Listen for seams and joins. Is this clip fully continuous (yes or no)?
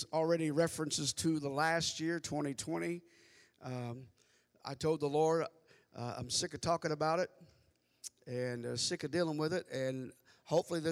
yes